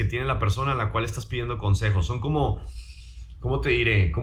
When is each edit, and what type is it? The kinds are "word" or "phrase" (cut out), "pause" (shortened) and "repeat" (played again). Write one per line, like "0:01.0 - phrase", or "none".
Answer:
none

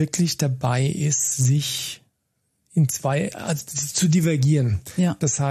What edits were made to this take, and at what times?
none

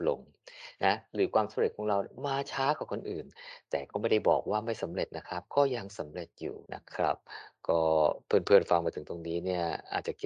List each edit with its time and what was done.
0:06.7 - pause

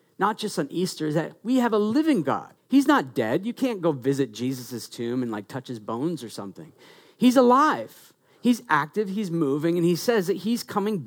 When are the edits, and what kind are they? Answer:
0:02.6 - pause

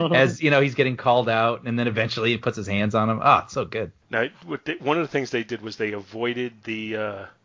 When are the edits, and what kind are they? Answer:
0:04.0 - pause

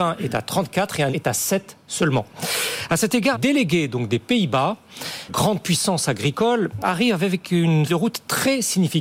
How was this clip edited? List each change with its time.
0:01.1 - word
0:03.3 - word
0:05.3 - word
0:06.8 - word
0:07.9 - word

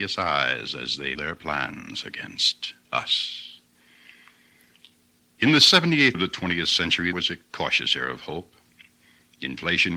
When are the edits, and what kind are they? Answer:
0:01.2 - word
0:06.1 - word
0:07.1 - word

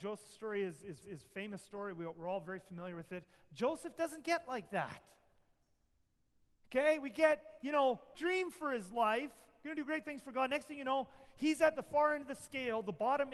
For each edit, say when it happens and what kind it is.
0:01.0 - repeat
0:08.1 - word

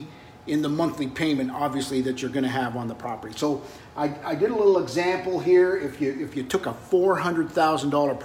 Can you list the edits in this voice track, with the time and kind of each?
none

